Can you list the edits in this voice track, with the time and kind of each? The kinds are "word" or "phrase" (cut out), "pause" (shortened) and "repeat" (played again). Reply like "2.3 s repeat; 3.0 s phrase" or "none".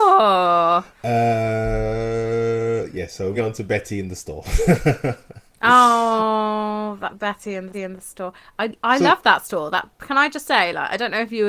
0.9 s pause; 3.3 s word; 7.7 s repeat